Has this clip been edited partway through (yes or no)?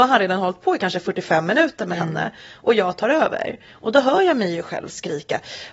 no